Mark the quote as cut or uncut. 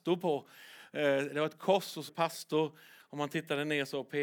cut